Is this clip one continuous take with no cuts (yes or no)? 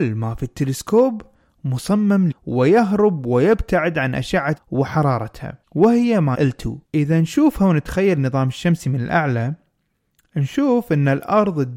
no